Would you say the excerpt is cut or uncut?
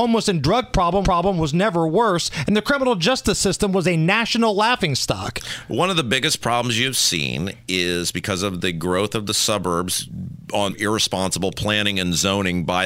cut